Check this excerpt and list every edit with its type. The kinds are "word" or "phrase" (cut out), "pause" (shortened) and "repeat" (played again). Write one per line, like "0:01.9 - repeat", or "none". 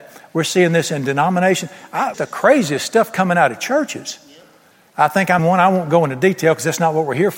0:02.1 - word
0:05.4 - word